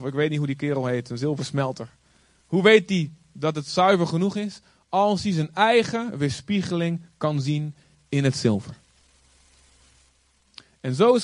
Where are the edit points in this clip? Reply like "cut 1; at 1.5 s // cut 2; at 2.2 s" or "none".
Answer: none